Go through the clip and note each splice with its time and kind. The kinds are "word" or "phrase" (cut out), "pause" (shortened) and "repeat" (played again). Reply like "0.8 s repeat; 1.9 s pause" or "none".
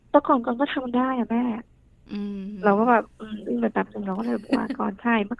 none